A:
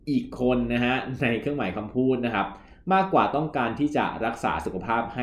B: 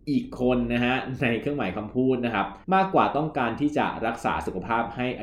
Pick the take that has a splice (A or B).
B